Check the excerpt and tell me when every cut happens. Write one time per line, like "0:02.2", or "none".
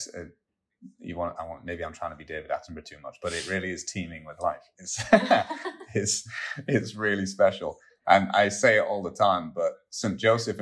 none